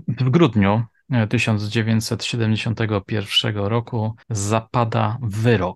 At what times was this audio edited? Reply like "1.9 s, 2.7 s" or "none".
4.2 s